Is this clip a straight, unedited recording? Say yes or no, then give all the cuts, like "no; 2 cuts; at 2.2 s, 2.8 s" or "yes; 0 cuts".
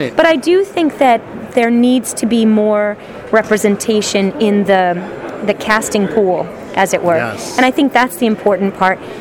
yes; 0 cuts